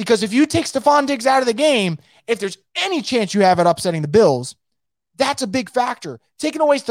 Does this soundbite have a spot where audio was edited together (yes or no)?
no